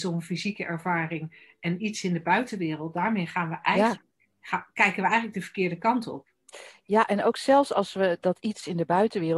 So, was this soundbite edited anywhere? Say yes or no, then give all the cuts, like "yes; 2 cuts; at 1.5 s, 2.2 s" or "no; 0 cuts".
yes; 1 cut; at 4.3 s